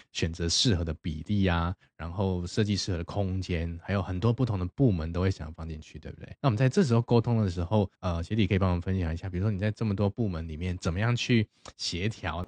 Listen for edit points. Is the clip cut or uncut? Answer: cut